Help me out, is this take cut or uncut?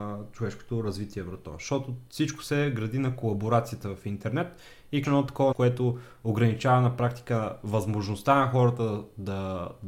cut